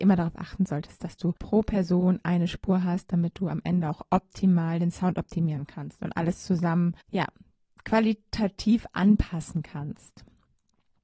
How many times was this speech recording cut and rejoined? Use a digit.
2